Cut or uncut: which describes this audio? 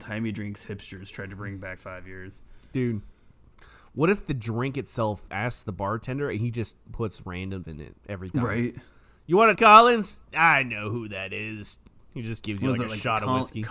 cut